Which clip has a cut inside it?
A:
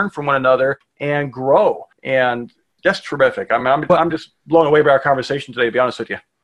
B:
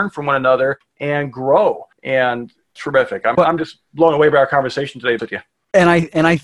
B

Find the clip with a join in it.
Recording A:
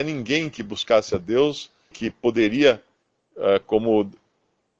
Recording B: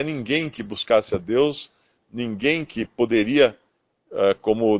A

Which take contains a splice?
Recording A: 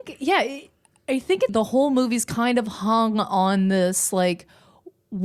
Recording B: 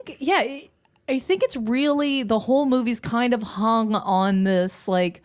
A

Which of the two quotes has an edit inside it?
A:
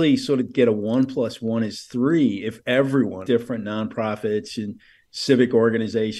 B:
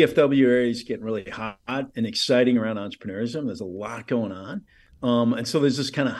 A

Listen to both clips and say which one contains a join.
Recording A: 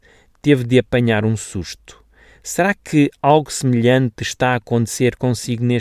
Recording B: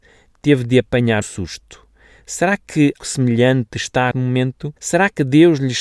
B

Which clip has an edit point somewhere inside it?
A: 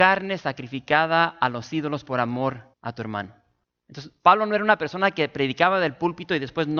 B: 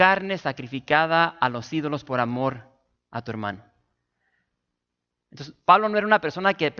A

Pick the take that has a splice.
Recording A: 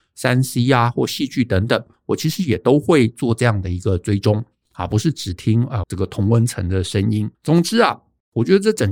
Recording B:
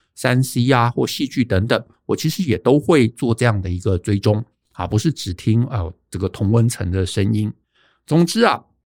A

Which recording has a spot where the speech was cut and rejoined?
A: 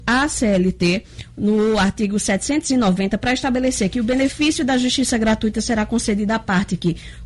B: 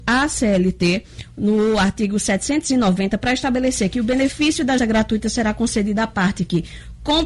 B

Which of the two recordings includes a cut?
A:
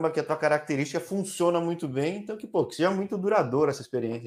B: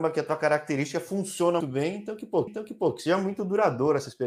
B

